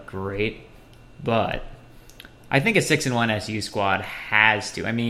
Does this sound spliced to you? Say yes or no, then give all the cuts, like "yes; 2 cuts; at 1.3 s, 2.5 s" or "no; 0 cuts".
no; 0 cuts